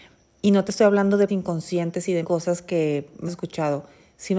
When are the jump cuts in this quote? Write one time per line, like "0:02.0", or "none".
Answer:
0:01.3
0:02.2
0:03.3